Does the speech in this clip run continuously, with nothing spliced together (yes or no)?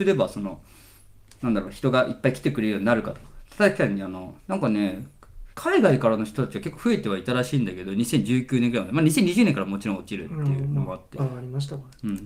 no